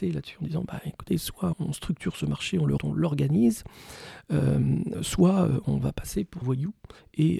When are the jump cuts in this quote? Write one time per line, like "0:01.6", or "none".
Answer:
0:01.5
0:02.8
0:04.9
0:06.4